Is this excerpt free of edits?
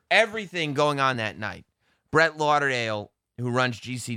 yes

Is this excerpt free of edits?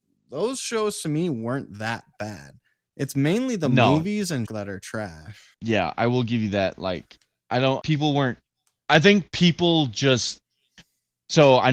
no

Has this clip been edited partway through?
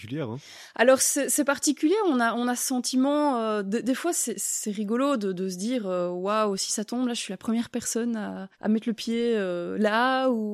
yes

